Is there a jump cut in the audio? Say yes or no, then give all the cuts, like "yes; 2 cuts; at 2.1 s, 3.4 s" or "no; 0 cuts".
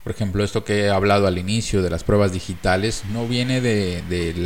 no; 0 cuts